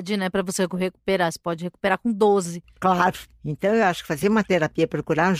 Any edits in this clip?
no; 0 cuts

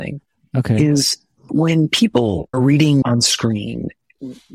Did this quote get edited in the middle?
yes; 2 cuts; at 1.5 s, 2.5 s

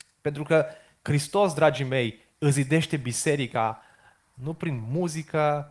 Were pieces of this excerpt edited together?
no; 0 cuts

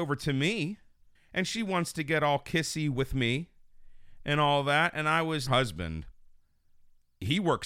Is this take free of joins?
no; 2 cuts; at 1.1 s, 5.5 s

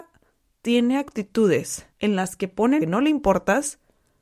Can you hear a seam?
yes; 2 cuts; at 1.9 s, 2.8 s

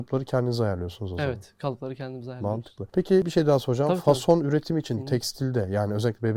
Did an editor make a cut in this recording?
no; 0 cuts

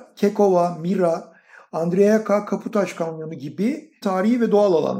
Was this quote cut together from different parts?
yes; 1 cut; at 4.0 s

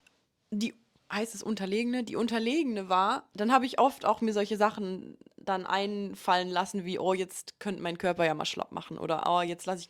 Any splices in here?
no; 0 cuts

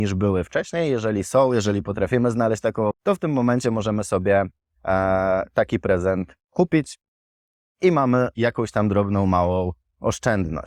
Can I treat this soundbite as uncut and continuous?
no; 2 cuts; at 2.9 s, 8.3 s

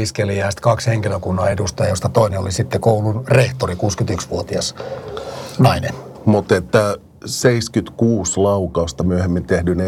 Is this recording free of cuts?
yes; 0 cuts

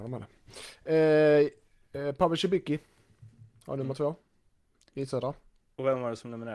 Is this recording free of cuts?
yes; 0 cuts

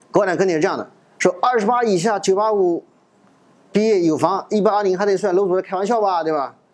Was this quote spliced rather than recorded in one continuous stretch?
no; 0 cuts

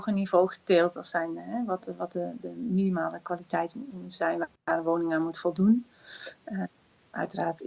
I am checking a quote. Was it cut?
no; 0 cuts

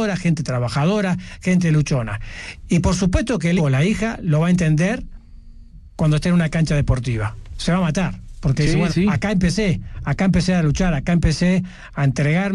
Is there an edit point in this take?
yes; 2 cuts; at 3.6 s, 8.9 s

